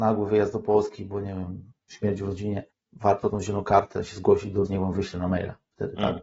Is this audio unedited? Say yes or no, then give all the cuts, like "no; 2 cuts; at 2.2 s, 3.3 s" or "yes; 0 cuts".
no; 3 cuts; at 1.8 s, 2.7 s, 4.7 s